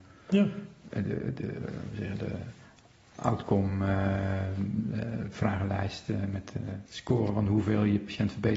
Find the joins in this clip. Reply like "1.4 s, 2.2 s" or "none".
6.9 s